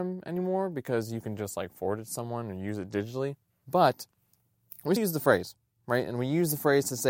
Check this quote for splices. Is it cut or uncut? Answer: cut